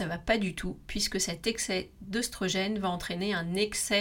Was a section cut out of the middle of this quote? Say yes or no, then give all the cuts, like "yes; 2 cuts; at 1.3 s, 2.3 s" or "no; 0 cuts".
no; 0 cuts